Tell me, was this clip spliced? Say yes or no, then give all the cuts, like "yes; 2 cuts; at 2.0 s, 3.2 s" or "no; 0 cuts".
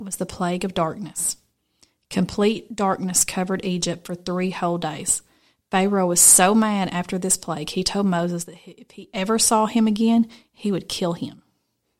no; 0 cuts